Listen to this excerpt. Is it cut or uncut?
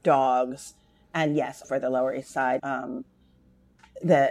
cut